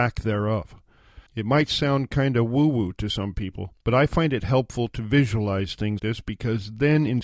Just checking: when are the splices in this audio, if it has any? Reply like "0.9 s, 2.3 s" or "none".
1.3 s, 3.8 s, 6.0 s